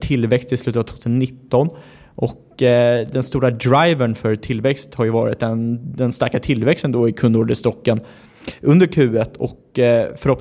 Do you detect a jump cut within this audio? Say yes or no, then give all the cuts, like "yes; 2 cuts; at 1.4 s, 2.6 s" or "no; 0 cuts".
no; 0 cuts